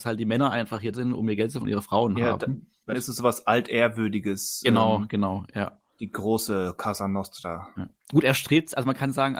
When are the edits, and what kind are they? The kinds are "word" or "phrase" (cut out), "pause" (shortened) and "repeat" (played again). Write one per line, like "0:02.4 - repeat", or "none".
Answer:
0:00.9 - word
0:01.6 - word
0:02.9 - phrase
0:05.9 - pause
0:08.0 - pause